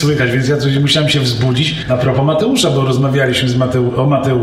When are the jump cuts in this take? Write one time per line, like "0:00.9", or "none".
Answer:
none